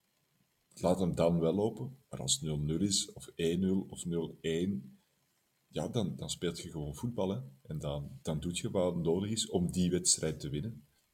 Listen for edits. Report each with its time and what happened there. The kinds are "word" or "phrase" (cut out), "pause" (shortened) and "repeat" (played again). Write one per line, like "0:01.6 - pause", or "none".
0:02.0 - pause
0:05.3 - pause
0:08.2 - pause